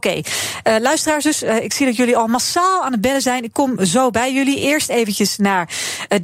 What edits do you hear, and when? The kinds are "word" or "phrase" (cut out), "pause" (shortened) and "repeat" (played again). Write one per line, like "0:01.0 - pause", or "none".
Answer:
none